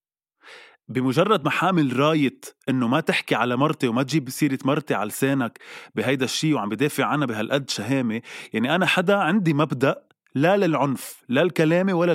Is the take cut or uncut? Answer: uncut